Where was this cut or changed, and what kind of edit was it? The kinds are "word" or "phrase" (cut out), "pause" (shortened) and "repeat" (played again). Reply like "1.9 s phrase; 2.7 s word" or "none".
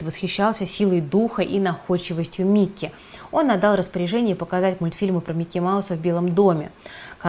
none